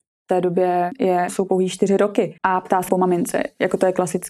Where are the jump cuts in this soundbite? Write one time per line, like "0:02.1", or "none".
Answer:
0:02.4
0:02.9